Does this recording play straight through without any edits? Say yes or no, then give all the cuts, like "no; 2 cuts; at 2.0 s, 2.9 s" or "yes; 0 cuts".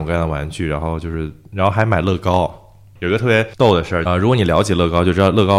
no; 1 cut; at 4.1 s